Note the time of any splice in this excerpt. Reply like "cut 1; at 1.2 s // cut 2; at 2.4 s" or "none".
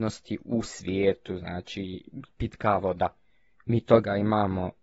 none

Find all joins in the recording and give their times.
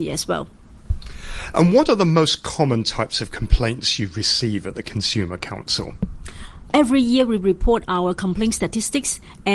none

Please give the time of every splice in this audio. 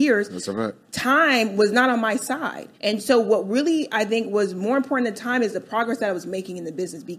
cut 1; at 2.7 s

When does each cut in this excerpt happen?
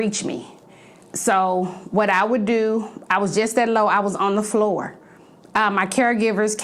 none

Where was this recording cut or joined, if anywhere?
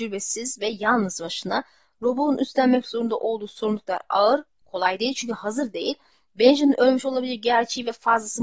none

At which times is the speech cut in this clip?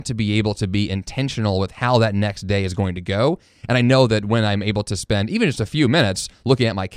none

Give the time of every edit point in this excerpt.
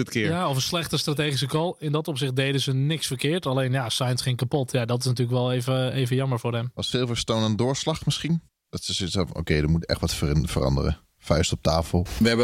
cut 1; at 8.5 s

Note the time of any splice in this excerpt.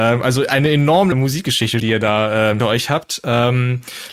cut 1; at 1.1 s // cut 2; at 1.8 s // cut 3; at 2.6 s

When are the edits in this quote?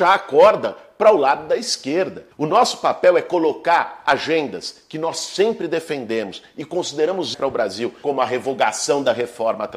cut 1; at 2.3 s // cut 2; at 7.3 s

